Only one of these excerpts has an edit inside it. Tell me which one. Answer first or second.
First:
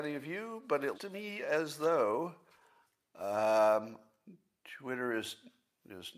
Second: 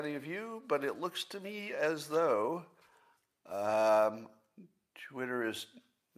first